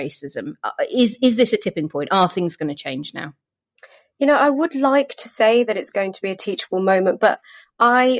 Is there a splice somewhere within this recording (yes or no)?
no